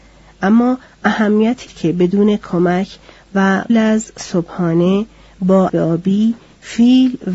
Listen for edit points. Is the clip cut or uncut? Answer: cut